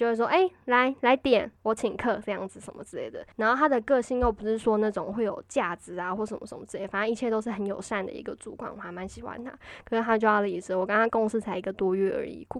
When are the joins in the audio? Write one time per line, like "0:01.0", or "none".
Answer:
0:01.6
0:03.3